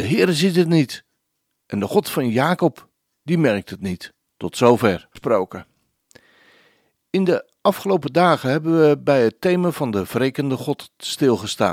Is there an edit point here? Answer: yes; 2 cuts; at 4.2 s, 5.1 s

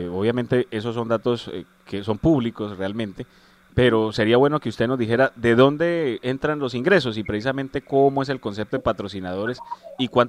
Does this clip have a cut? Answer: no; 0 cuts

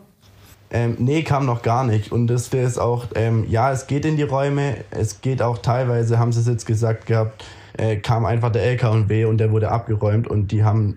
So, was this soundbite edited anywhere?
yes; 2 cuts; at 2.5 s, 7.7 s

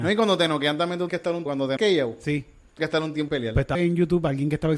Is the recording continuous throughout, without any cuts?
no; 6 cuts; at 1.1 s, 1.5 s, 1.8 s, 2.8 s, 3.3 s, 3.7 s

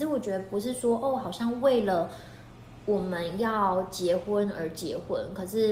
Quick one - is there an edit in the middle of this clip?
no; 0 cuts

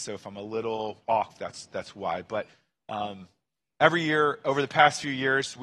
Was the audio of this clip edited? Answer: no; 0 cuts

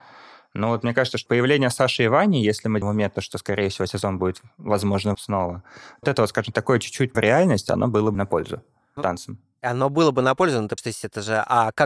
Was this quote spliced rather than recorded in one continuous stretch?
yes; 9 cuts; at 1.3 s, 2.8 s, 5.1 s, 6.0 s, 6.5 s, 7.1 s, 8.1 s, 9.0 s, 10.8 s

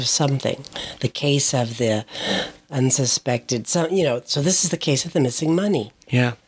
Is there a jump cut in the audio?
no; 0 cuts

